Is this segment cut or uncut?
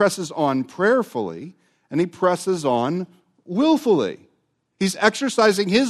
uncut